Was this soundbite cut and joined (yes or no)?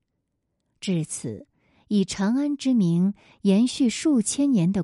no